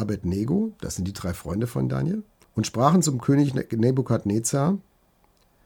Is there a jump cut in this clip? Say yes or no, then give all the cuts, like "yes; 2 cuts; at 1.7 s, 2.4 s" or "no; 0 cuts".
yes; 1 cut; at 2.4 s